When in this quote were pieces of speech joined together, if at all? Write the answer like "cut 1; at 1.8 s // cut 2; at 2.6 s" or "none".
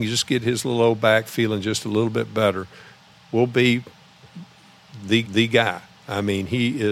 cut 1; at 5.2 s

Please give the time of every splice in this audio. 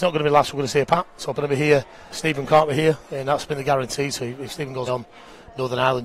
cut 1; at 1.3 s // cut 2; at 2.1 s // cut 3; at 4.9 s

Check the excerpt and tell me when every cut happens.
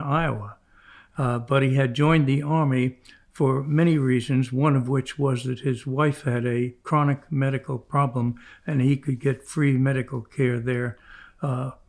none

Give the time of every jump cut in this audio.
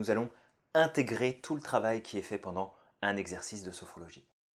none

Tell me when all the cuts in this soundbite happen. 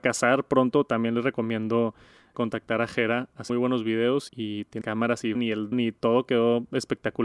cut 1; at 2.3 s // cut 2; at 3.5 s // cut 3; at 4.3 s // cut 4; at 4.8 s // cut 5; at 5.3 s // cut 6; at 5.7 s

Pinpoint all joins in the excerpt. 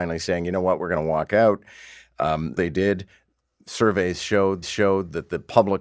cut 1; at 2.6 s // cut 2; at 4.6 s

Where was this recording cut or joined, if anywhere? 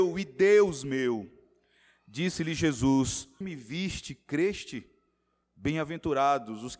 cut 1; at 3.4 s

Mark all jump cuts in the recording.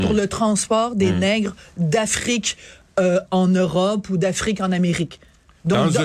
none

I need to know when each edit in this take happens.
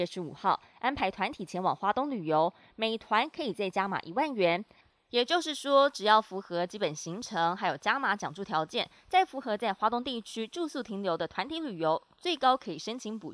none

